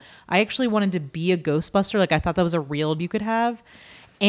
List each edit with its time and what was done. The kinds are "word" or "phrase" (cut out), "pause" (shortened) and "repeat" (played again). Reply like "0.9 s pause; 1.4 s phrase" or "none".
3.0 s word